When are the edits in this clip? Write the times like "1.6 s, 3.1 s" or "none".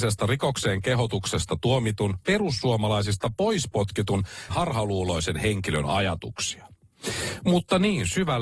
2.2 s, 4.5 s